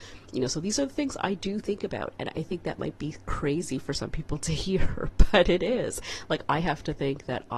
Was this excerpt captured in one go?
yes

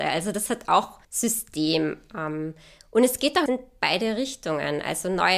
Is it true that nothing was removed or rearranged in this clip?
no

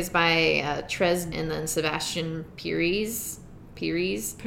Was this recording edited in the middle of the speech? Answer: yes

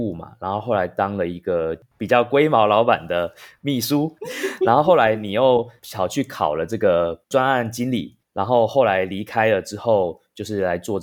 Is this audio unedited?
no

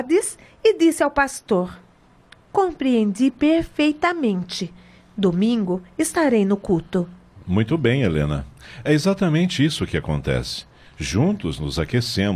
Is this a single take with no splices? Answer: yes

